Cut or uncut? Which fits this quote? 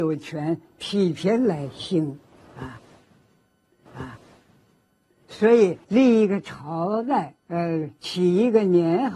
cut